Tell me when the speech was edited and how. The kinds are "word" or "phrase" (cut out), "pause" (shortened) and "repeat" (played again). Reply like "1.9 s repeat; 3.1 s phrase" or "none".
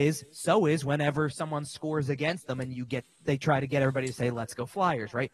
3.1 s pause

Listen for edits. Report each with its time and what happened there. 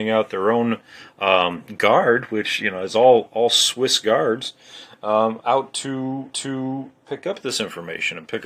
6.3 s repeat

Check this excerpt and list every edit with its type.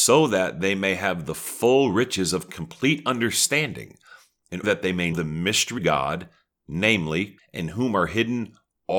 4.6 s word; 5.1 s word; 5.8 s word; 7.4 s word

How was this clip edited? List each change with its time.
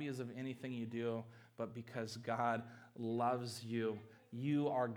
none

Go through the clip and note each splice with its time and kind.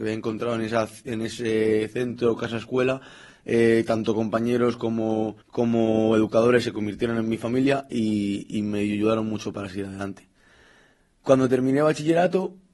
5.4 s pause

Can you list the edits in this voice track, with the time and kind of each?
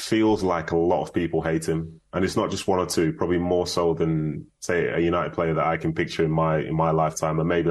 none

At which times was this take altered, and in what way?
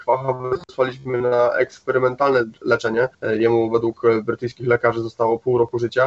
3.1 s pause

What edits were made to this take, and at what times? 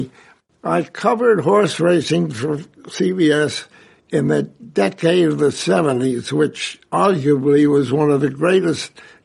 none

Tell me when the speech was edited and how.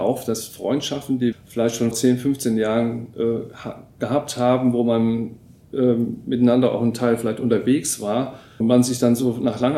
1.3 s word; 1.9 s word; 8.6 s word

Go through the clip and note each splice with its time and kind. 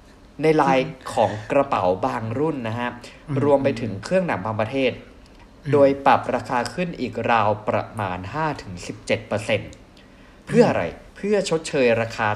11.1 s pause

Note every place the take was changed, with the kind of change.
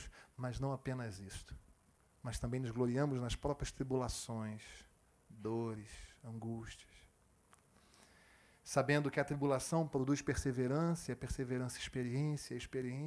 2.0 s pause

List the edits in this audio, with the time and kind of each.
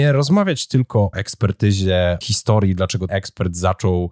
1.1 s word; 2.2 s word; 3.1 s word

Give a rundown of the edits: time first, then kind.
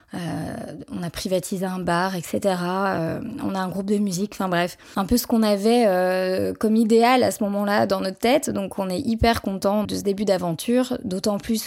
9.8 s word

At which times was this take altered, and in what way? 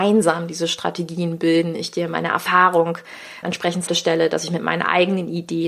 3.4 s word; 3.9 s word

